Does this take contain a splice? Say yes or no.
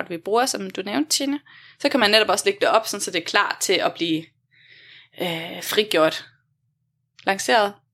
no